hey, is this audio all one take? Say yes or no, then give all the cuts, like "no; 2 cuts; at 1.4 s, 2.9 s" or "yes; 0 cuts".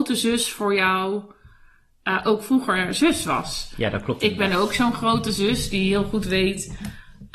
yes; 0 cuts